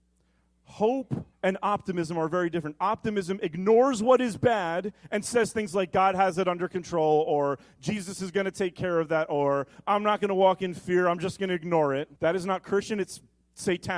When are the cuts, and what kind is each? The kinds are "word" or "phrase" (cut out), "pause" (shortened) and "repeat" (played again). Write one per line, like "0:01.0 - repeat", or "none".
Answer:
0:01.3 - pause
0:12.2 - pause